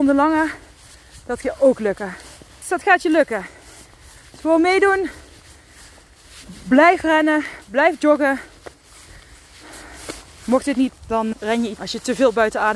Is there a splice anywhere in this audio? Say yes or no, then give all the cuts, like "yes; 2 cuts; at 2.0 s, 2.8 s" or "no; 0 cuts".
yes; 5 cuts; at 1.4 s, 2.6 s, 10.9 s, 11.3 s, 11.8 s